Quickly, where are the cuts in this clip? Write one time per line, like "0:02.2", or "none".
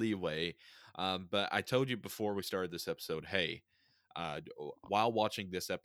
none